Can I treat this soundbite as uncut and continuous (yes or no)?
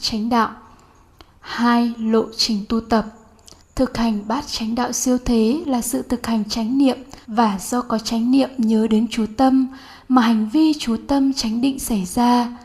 no